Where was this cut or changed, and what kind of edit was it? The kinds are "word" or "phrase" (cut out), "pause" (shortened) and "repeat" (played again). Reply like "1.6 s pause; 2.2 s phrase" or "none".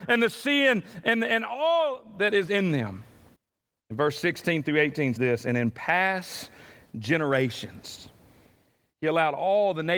3.3 s pause; 5.2 s word